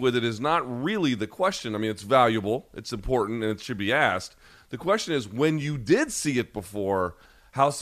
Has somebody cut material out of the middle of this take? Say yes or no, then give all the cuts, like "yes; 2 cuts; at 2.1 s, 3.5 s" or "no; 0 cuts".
no; 0 cuts